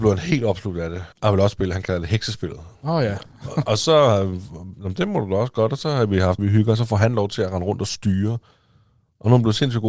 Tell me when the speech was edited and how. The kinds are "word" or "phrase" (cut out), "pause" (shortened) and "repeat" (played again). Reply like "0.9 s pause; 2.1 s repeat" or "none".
1.1 s pause; 2.7 s pause; 6.4 s phrase